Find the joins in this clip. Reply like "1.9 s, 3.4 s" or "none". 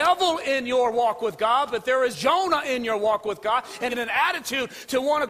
2.1 s, 3.9 s